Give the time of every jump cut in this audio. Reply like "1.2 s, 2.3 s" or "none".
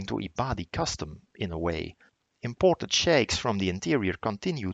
2.1 s